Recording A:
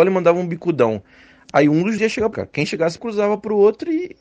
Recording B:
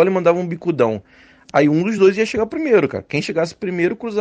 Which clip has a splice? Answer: A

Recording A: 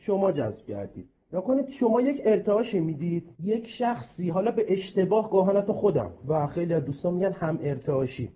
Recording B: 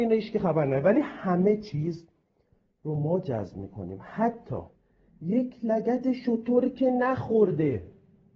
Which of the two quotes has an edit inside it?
A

